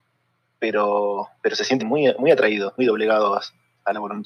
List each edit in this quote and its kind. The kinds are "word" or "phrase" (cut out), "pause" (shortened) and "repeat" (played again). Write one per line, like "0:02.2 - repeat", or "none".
0:01.3 - pause
0:01.8 - word
0:02.8 - word